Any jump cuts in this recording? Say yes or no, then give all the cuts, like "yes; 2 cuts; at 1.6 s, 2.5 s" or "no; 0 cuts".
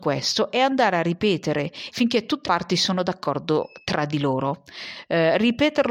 yes; 2 cuts; at 1.9 s, 2.4 s